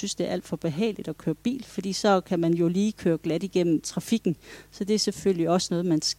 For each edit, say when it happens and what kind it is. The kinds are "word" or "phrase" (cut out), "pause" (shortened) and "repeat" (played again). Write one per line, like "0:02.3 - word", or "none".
none